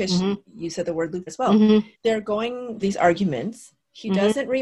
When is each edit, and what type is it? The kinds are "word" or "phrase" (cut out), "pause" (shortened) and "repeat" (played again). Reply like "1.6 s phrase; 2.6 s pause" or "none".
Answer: 1.3 s word; 1.9 s pause; 2.8 s word